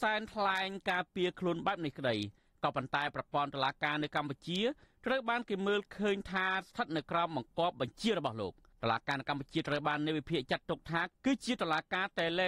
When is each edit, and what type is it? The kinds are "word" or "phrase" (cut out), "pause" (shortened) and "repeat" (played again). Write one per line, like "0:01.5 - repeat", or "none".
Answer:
none